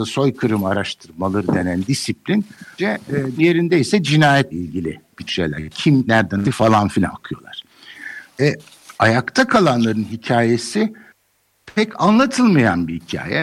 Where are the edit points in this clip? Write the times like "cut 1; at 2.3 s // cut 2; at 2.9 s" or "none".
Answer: cut 1; at 2.8 s // cut 2; at 3.4 s // cut 3; at 4.5 s // cut 4; at 5.3 s // cut 5; at 6.1 s // cut 6; at 6.4 s // cut 7; at 7.1 s // cut 8; at 9.0 s